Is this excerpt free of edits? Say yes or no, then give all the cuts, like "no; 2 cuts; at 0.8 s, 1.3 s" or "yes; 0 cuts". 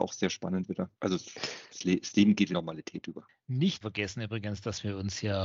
no; 3 cuts; at 1.0 s, 2.5 s, 3.8 s